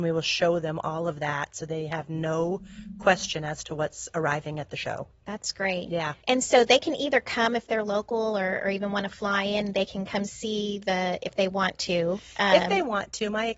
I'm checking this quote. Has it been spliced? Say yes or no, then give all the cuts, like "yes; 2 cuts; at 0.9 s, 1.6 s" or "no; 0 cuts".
yes; 1 cut; at 6.2 s